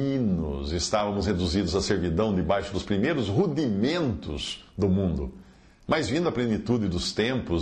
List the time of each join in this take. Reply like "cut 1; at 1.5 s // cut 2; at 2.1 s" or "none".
none